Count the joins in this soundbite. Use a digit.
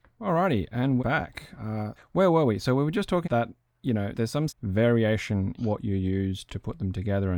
7